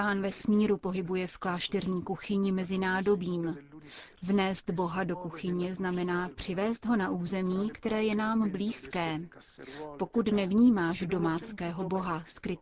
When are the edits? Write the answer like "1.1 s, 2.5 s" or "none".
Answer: none